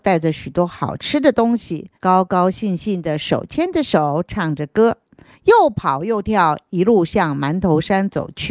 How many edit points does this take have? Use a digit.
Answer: 1